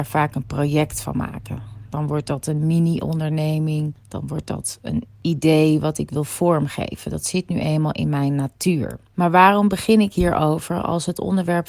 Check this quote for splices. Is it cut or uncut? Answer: uncut